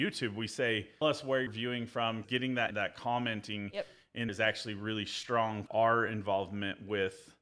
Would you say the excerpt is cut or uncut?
cut